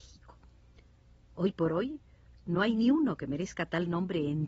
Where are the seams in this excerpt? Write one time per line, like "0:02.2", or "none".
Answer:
none